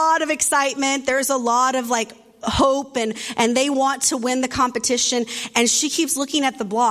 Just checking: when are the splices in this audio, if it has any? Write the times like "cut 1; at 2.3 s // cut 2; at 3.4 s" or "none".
none